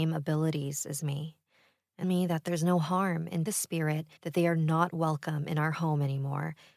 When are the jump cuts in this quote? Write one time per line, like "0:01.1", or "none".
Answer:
0:02.0
0:03.5
0:04.2